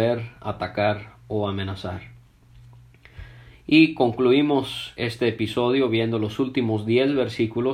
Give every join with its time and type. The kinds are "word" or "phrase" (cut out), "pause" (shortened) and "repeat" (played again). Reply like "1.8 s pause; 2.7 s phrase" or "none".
5.0 s word